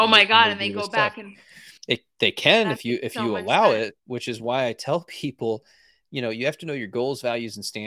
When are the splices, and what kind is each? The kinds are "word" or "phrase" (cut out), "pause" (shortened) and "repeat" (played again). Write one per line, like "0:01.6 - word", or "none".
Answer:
0:01.8 - pause